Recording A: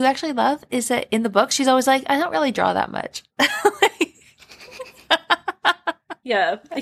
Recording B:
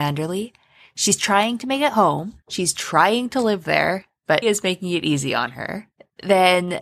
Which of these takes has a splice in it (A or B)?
B